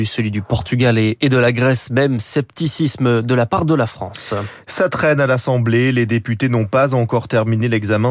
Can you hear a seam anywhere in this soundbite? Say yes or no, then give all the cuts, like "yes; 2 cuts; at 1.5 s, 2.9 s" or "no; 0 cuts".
no; 0 cuts